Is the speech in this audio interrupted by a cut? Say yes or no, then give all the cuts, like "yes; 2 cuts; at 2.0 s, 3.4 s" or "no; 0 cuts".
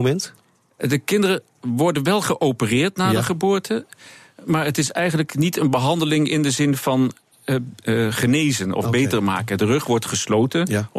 no; 0 cuts